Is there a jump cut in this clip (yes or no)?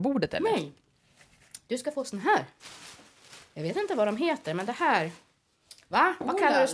no